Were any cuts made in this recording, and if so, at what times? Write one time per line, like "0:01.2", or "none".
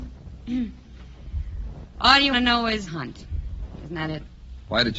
0:02.3
0:02.9